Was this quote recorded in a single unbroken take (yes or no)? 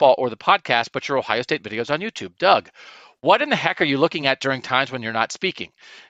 yes